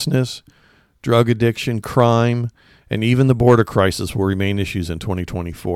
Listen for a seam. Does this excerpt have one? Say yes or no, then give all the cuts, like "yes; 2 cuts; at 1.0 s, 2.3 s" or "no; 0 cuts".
no; 0 cuts